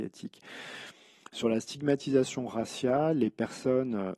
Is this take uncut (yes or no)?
yes